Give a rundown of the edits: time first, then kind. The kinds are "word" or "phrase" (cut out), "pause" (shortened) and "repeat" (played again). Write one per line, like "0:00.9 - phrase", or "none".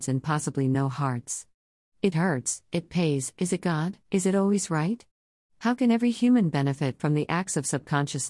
0:02.1 - phrase
0:04.0 - pause